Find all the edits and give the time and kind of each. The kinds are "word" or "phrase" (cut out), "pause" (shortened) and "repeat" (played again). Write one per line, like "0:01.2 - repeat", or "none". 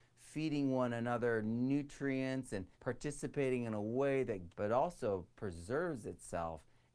0:02.7 - pause
0:04.5 - phrase